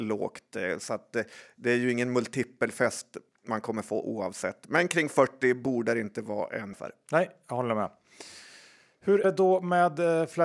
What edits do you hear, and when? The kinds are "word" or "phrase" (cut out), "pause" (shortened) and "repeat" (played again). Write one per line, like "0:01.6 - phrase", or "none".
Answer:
0:06.7 - word
0:09.2 - word